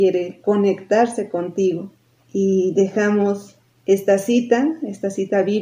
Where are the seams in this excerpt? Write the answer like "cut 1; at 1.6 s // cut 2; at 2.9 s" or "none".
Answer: none